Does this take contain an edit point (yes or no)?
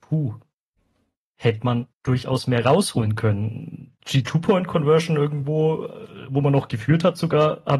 yes